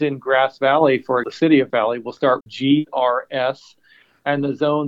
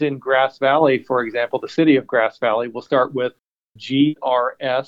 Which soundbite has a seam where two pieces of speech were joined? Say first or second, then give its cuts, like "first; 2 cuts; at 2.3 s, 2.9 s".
first; 3 cuts; at 1.2 s, 1.7 s, 2.4 s